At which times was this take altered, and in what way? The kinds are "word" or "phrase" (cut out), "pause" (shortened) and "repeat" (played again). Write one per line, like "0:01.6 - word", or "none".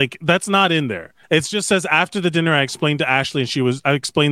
0:01.2 - pause